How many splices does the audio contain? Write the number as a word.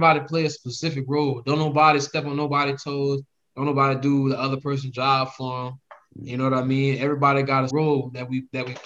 one